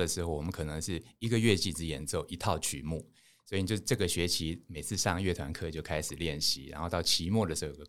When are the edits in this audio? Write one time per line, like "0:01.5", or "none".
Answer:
none